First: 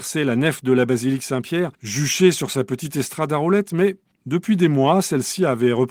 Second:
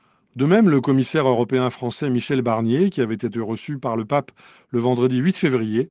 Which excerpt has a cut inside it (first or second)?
first